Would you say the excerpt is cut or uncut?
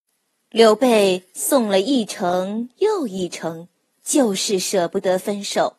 cut